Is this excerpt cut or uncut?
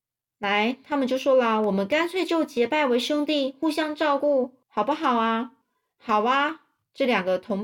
cut